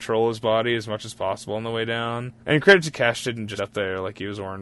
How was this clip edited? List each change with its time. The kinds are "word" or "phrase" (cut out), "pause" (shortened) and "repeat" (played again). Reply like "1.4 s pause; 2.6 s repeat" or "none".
2.4 s pause; 2.9 s word; 3.6 s word